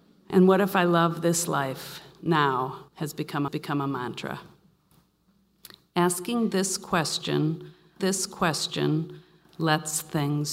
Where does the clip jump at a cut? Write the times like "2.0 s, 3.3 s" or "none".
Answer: 2.9 s, 3.5 s, 8.0 s